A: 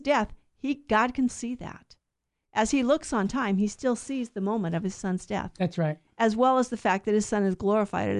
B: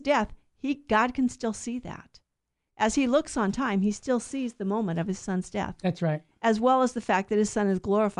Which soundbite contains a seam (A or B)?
A